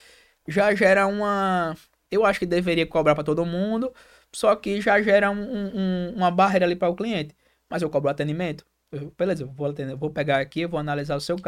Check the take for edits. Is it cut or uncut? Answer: uncut